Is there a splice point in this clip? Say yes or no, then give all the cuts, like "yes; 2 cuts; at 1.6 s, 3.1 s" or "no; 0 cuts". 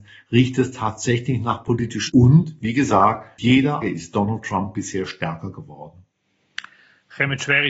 yes; 3 cuts; at 2.1 s, 3.4 s, 3.8 s